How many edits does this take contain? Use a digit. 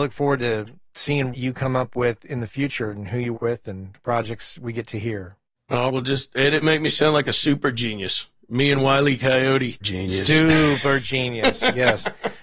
5